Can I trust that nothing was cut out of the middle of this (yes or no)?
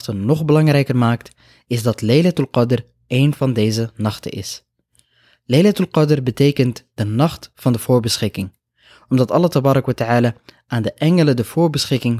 yes